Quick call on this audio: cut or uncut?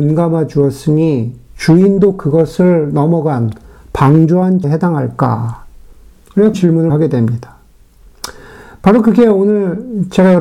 cut